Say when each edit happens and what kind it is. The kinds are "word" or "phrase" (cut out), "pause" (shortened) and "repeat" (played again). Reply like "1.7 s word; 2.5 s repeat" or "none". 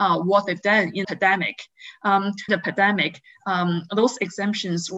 1.0 s word; 2.5 s phrase